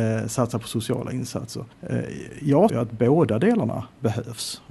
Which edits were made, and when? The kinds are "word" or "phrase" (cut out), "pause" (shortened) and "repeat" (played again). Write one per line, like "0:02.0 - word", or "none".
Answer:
0:01.7 - pause
0:02.7 - word